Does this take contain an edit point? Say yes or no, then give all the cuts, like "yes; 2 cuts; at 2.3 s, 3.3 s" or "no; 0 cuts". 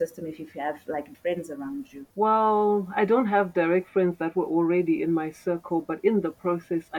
yes; 2 cuts; at 1.1 s, 2.1 s